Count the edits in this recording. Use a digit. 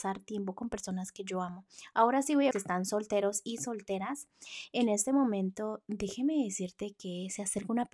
1